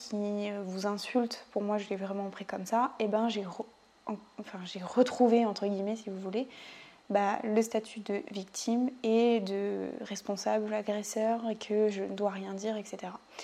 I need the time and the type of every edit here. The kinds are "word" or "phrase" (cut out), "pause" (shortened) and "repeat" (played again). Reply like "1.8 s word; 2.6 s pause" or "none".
none